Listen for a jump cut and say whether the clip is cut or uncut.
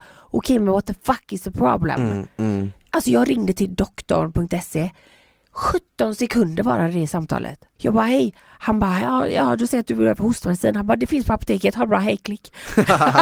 uncut